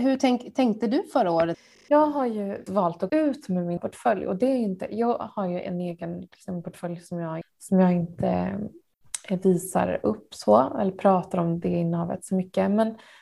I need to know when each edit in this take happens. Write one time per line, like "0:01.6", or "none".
0:02.7
0:03.1
0:03.8
0:07.4